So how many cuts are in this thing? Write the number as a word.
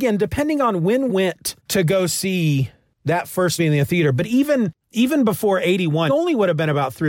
five